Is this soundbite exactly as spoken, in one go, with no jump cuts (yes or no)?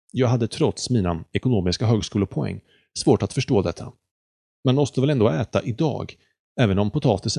yes